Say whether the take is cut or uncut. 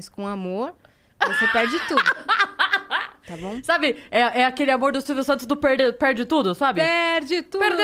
uncut